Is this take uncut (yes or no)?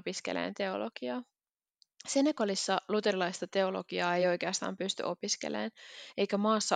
yes